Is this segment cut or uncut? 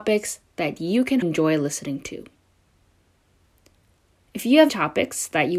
cut